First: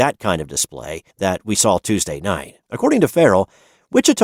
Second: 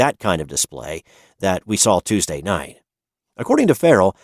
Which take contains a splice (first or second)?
first